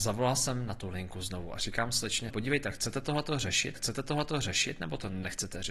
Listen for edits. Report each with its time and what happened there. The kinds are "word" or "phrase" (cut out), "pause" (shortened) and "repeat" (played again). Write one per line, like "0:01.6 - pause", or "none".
0:02.3 - word
0:03.8 - repeat